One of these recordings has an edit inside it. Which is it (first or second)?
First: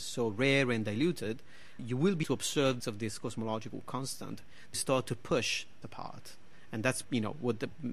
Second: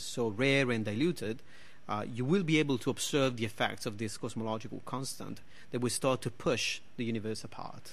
first